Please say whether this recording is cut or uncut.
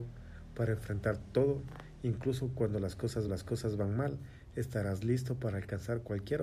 cut